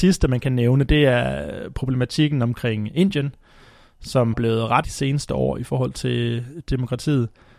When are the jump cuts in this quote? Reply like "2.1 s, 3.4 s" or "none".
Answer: 4.3 s, 4.8 s